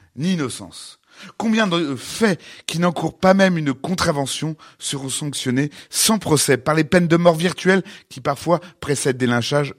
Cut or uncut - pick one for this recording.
uncut